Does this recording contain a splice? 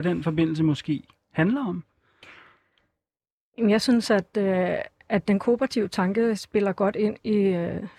no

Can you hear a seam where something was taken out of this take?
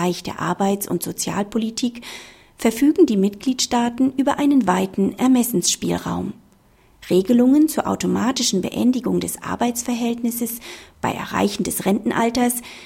no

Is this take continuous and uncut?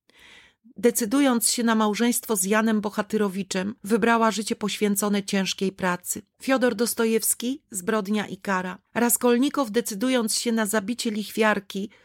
no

